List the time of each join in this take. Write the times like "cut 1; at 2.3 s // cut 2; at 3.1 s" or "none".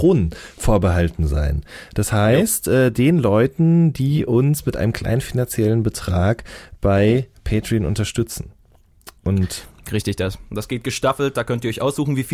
cut 1; at 9.2 s